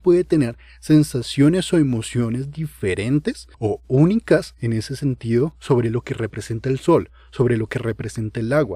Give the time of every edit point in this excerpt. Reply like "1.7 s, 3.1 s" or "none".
3.5 s

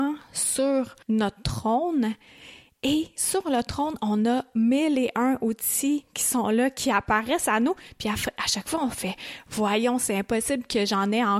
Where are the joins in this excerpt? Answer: 1.0 s

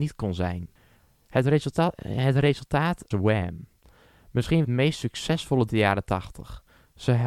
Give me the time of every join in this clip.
3.1 s, 4.6 s, 5.7 s

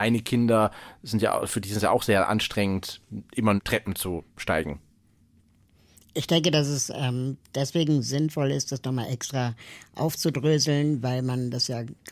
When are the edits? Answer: 3.6 s

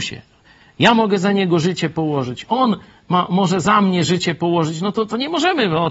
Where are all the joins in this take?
none

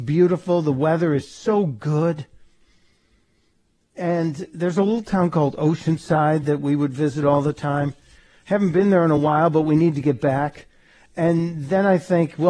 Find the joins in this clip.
none

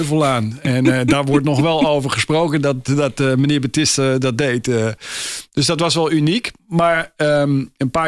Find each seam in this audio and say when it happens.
none

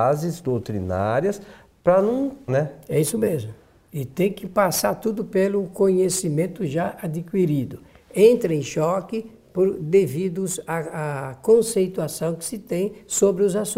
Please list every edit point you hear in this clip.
2.5 s

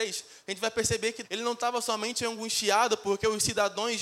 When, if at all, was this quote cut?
1.2 s

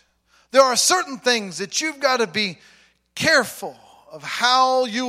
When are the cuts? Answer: none

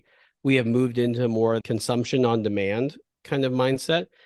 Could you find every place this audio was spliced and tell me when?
1.6 s

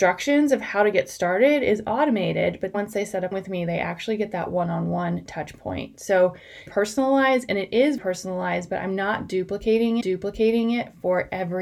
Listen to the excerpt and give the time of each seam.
2.7 s, 3.3 s, 6.7 s, 8.0 s, 10.0 s

